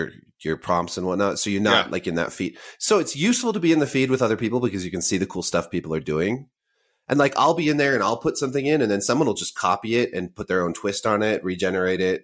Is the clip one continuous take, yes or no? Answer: yes